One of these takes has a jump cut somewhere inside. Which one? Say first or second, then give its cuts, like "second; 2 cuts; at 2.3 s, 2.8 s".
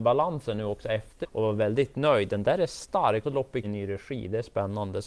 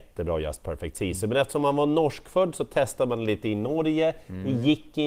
first; 3 cuts; at 1.2 s, 3.2 s, 3.6 s